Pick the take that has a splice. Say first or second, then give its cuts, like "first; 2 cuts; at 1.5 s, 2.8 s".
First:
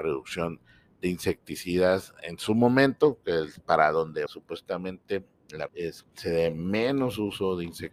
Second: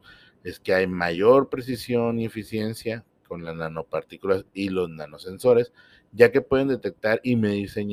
first; 3 cuts; at 4.3 s, 5.7 s, 6.0 s